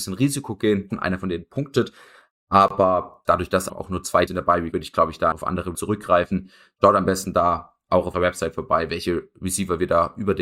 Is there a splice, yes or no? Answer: yes